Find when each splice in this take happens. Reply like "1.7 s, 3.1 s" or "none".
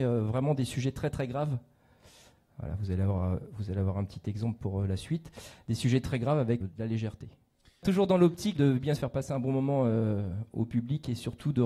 6.6 s, 8.6 s, 9.0 s